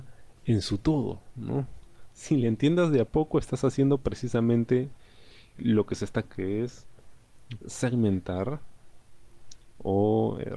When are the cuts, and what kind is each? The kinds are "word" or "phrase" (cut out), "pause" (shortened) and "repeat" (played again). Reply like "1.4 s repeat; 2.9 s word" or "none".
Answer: 5.6 s word; 6.2 s word; 7.6 s word